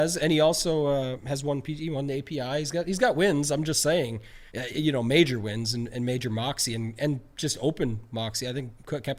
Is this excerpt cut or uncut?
cut